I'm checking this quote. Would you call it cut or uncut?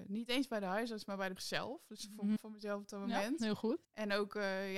cut